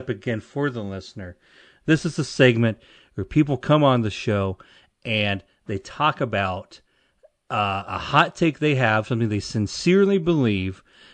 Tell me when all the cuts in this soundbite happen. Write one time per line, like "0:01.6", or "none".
none